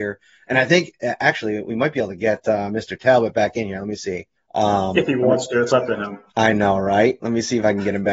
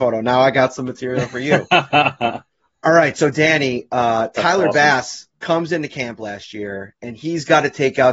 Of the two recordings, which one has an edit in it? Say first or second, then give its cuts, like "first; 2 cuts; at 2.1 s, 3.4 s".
first; 2 cuts; at 4.3 s, 6.3 s